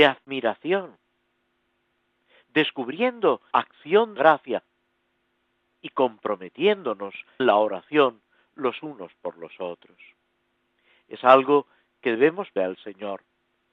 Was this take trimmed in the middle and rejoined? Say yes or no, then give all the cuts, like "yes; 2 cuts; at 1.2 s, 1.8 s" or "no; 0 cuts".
yes; 4 cuts; at 3.5 s, 4.2 s, 7.4 s, 12.6 s